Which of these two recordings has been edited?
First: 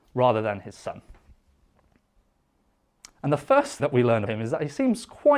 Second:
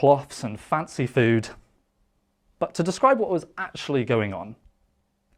first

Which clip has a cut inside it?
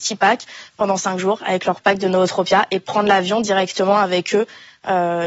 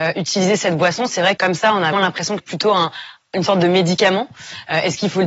second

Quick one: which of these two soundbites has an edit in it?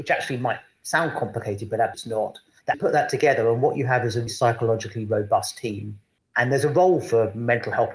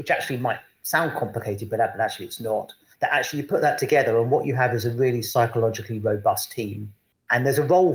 first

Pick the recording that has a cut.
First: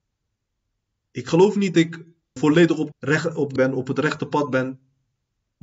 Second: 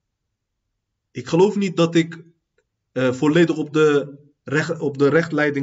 first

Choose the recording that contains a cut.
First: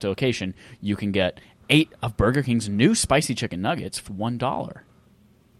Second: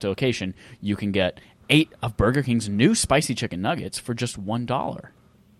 first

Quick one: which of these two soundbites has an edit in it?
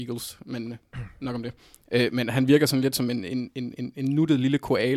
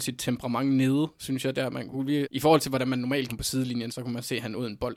second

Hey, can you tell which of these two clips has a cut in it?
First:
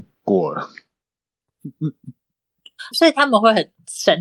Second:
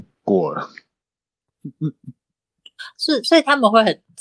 first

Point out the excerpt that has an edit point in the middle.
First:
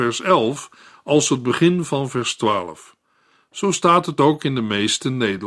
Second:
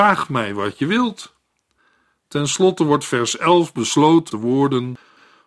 second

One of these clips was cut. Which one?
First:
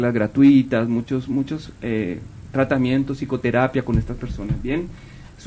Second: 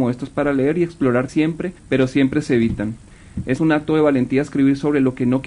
second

